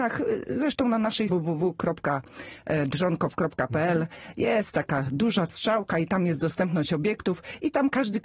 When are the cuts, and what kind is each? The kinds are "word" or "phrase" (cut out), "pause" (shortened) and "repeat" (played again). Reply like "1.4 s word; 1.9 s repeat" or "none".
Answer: 1.3 s word; 5.5 s word